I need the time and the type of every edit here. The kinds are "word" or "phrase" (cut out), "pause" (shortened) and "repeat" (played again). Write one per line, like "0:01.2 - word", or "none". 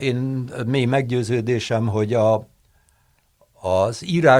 none